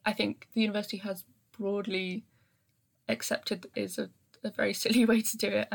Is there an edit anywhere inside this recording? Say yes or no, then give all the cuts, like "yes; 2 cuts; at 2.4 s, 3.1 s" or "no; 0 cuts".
yes; 1 cut; at 3.7 s